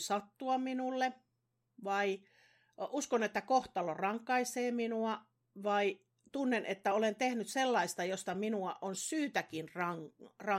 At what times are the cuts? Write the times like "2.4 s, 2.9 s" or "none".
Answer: none